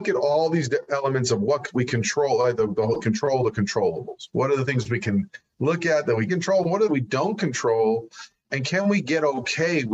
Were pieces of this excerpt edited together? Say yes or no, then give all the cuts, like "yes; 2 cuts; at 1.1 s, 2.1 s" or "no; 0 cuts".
yes; 3 cuts; at 3.0 s, 6.3 s, 6.9 s